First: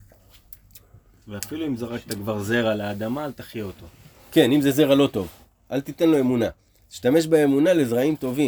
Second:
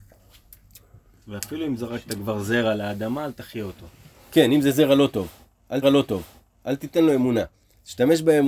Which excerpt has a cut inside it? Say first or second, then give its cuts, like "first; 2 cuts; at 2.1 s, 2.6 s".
second; 1 cut; at 5.8 s